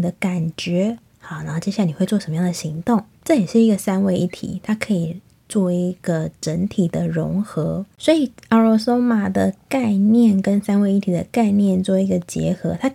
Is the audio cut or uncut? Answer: cut